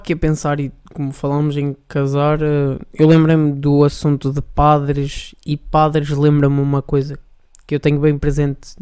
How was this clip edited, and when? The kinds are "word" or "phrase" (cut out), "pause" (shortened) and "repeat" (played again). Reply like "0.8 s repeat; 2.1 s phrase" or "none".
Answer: none